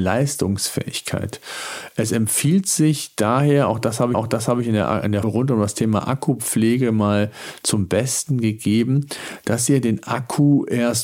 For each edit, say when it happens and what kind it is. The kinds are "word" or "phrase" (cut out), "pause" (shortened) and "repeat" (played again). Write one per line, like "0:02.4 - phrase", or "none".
0:04.1 - repeat
0:05.2 - word